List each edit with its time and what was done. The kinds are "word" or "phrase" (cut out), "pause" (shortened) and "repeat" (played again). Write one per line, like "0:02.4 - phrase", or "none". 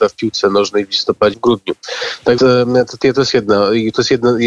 0:01.3 - word
0:02.4 - word
0:03.0 - word

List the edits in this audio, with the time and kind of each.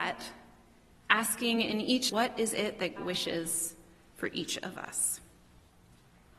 0:02.1 - phrase
0:03.0 - word

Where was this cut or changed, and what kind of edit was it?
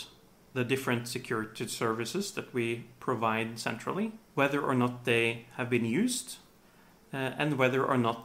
0:04.2 - pause

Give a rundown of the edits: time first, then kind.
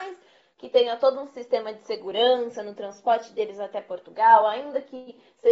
none

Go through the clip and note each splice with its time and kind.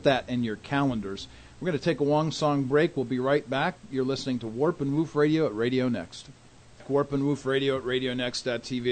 none

